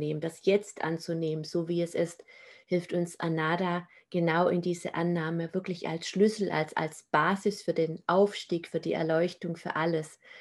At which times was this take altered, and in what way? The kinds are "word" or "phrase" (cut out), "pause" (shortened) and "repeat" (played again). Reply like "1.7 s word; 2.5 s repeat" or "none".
none